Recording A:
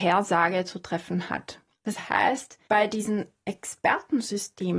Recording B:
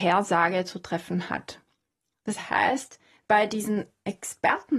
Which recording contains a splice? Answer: A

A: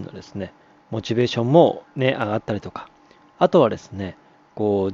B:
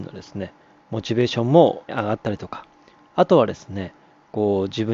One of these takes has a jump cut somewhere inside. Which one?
B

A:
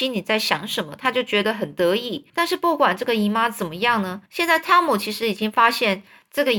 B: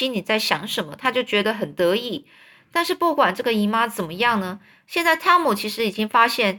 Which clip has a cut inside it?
A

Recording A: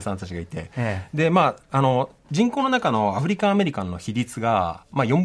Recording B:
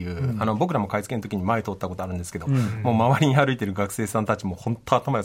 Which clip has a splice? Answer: A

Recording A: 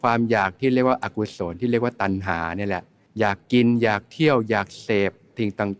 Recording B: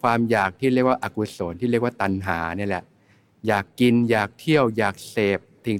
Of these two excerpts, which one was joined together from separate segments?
A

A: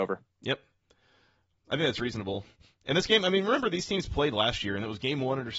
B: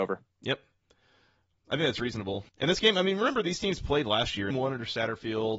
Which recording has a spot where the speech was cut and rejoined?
B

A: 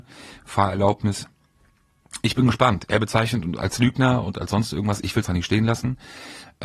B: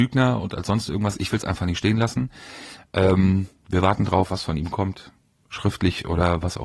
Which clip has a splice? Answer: A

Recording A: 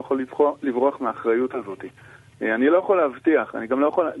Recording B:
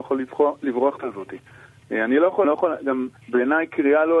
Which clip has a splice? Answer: B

